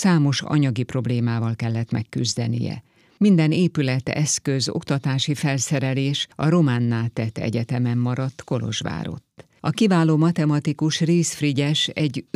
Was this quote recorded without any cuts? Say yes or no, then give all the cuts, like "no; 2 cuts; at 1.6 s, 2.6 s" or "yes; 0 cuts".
no; 1 cut; at 9.6 s